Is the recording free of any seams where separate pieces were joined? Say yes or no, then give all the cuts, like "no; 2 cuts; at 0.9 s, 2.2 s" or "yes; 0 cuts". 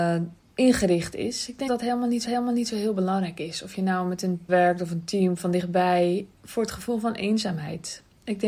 no; 4 cuts; at 1.7 s, 2.2 s, 4.5 s, 6.3 s